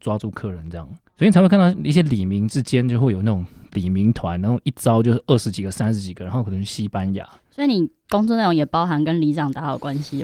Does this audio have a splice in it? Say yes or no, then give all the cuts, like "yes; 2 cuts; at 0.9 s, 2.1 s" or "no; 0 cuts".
no; 0 cuts